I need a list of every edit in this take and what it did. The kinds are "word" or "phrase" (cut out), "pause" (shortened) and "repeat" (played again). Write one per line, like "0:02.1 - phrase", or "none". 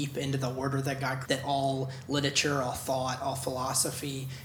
0:01.2 - word

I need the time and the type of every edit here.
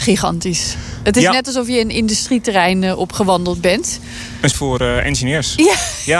0:04.5 - word

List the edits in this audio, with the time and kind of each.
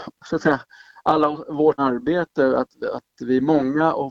0:01.8 - word

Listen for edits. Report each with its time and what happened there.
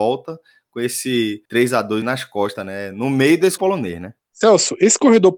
0:01.5 - pause
0:02.0 - word
0:03.6 - word
0:04.2 - pause

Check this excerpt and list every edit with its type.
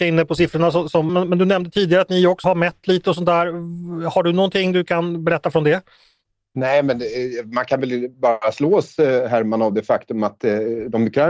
0:01.1 - phrase
0:02.4 - word
0:08.1 - pause

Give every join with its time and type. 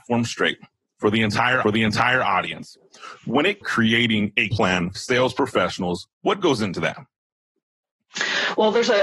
0:01.6 - repeat
0:03.6 - phrase
0:04.5 - word
0:04.9 - word
0:06.1 - pause

